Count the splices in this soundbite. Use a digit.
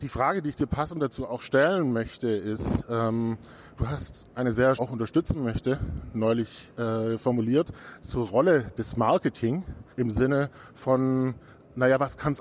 2